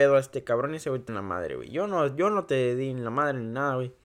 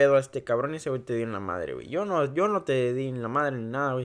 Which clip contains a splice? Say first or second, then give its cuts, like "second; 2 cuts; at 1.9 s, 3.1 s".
first; 1 cut; at 1.1 s